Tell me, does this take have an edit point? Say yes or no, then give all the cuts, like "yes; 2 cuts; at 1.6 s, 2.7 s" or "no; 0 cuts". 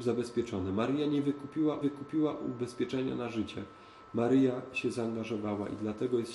yes; 1 cut; at 1.8 s